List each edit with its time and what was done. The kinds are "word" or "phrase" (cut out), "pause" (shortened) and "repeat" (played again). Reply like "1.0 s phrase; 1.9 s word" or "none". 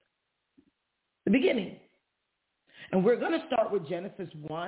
none